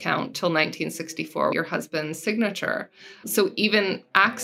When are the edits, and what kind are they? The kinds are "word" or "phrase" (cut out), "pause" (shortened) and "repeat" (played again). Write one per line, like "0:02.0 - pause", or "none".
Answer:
0:01.5 - word
0:03.2 - word